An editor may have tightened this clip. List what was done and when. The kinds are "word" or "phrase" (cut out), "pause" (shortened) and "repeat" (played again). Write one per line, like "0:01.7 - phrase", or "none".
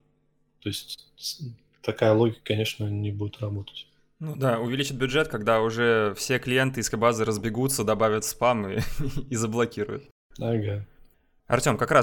0:06.9 - word